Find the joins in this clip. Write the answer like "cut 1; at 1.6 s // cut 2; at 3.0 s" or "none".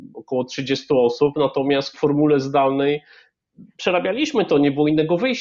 cut 1; at 1.9 s